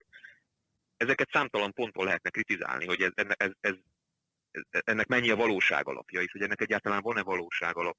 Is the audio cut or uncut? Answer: uncut